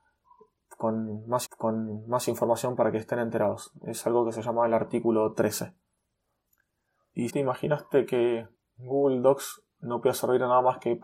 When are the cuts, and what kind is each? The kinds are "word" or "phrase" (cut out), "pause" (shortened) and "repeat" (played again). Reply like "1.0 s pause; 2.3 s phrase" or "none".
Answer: 1.4 s repeat; 7.3 s word; 8.5 s pause